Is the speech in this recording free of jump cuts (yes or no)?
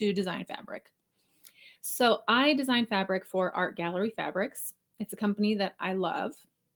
yes